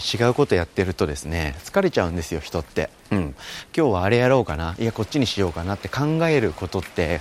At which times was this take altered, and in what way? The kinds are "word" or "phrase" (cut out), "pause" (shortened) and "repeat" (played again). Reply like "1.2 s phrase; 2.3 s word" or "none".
3.0 s pause